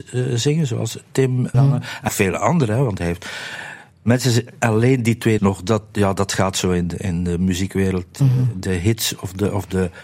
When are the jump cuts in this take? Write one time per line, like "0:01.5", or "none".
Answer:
0:01.5
0:02.1
0:04.6
0:05.4